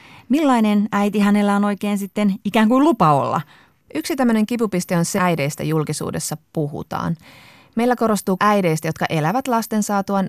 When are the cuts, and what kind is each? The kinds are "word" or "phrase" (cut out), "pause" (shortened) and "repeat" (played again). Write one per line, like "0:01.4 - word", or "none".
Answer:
0:05.2 - word
0:08.4 - word